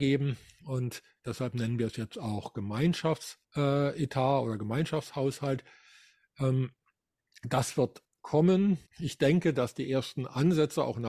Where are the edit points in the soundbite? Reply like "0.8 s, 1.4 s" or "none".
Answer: 3.4 s, 8.9 s